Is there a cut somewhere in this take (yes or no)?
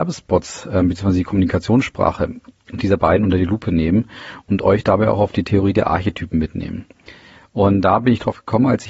no